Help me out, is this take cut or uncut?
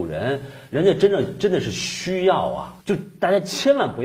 cut